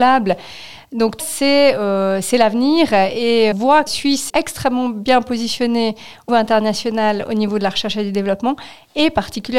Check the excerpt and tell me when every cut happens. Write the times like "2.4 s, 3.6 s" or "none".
1.2 s, 3.5 s, 3.9 s, 4.3 s, 6.3 s